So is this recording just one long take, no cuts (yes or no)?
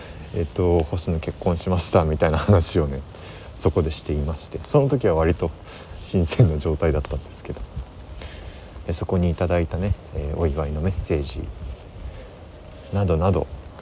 yes